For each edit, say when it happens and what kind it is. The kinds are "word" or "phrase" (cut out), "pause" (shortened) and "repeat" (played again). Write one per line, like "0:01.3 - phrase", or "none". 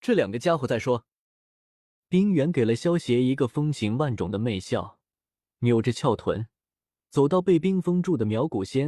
none